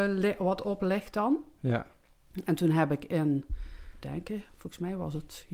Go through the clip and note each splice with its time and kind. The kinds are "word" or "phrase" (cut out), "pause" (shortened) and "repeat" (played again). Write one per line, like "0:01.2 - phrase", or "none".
0:04.0 - word